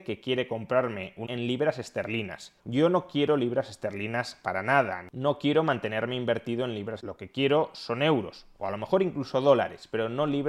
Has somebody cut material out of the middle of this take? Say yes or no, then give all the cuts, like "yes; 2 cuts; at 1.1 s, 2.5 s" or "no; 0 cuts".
yes; 3 cuts; at 1.3 s, 2.6 s, 7.0 s